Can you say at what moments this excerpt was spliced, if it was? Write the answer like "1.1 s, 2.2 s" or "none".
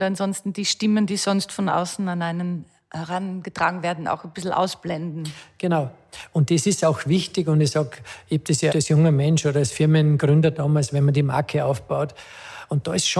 8.7 s